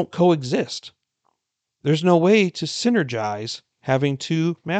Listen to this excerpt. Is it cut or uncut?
uncut